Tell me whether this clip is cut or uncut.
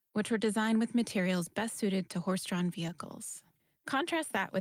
uncut